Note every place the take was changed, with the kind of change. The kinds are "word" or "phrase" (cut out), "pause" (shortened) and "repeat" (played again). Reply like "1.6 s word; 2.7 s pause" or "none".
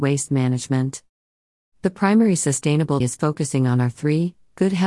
3.0 s phrase